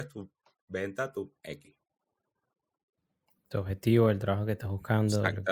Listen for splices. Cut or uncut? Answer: uncut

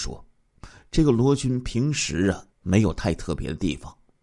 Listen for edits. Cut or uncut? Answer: cut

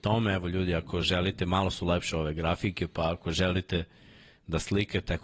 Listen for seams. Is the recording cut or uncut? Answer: uncut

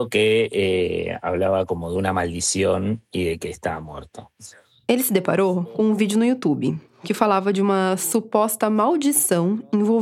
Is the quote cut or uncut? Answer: uncut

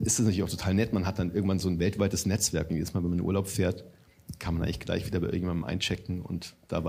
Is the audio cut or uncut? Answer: uncut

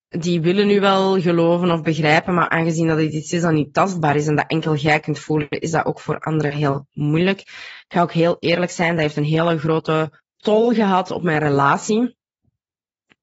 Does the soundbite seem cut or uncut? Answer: cut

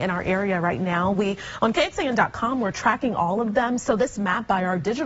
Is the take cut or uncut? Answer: uncut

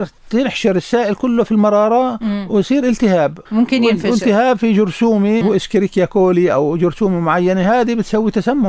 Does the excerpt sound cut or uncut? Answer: cut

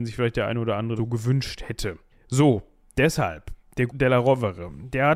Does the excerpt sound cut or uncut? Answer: cut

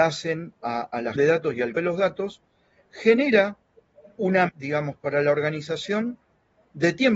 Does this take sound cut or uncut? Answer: cut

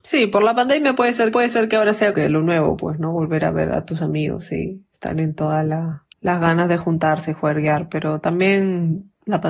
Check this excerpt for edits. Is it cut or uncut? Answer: cut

